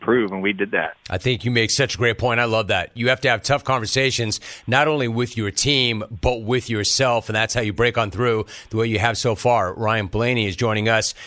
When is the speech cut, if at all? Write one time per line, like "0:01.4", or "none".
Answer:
none

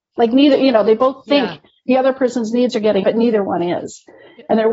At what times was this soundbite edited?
0:03.0

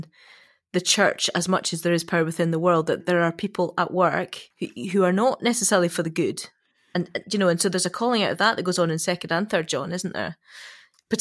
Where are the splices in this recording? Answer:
0:03.0
0:04.5

